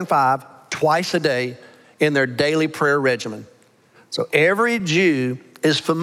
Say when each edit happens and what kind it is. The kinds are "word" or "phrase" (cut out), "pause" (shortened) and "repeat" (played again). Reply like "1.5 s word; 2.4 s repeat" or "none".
none